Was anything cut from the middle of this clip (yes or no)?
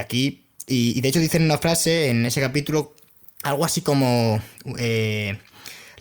no